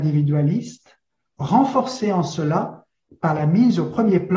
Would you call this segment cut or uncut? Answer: uncut